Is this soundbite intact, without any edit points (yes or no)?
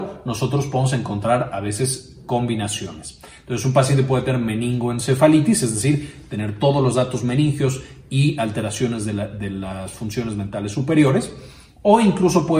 yes